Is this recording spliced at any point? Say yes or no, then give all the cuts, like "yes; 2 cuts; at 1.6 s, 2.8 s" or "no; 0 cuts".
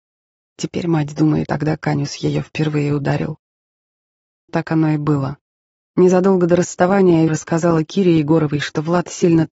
yes; 3 cuts; at 1.5 s, 4.5 s, 7.3 s